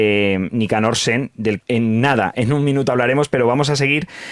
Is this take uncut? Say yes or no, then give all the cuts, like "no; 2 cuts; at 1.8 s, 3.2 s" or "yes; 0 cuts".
no; 1 cut; at 1.6 s